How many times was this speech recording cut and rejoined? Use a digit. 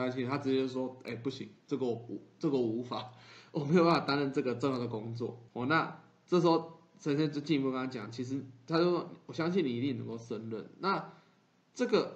1